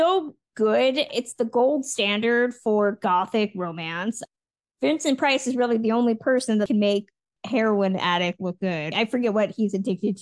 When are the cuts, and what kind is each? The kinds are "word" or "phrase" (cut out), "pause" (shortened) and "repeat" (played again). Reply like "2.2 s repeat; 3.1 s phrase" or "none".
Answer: none